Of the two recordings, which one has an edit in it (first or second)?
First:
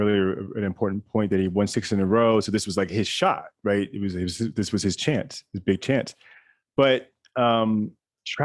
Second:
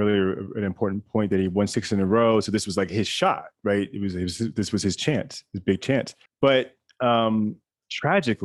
second